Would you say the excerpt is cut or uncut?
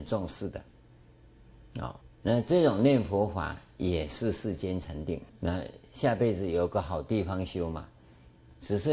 cut